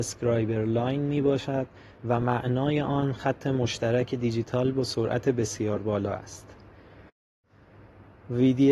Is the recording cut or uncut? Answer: uncut